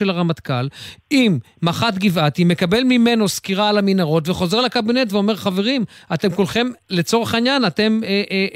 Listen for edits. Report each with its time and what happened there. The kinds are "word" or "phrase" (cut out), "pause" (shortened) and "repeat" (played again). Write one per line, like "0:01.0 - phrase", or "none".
none